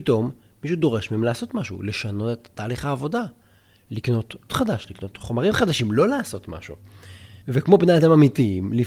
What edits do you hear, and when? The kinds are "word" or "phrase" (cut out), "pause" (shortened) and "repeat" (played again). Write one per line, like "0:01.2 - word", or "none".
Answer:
0:04.5 - word
0:07.4 - pause